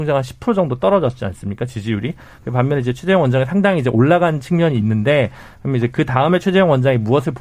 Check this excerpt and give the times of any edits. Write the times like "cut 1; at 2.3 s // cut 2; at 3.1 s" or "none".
none